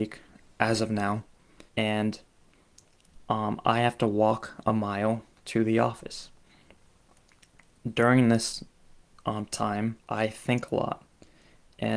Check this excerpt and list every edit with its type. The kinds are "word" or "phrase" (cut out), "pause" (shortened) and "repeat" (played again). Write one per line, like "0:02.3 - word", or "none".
0:01.7 - pause
0:10.0 - pause